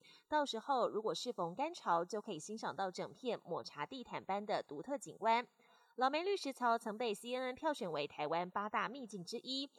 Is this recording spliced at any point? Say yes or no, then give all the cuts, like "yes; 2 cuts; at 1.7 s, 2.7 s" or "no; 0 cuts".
no; 0 cuts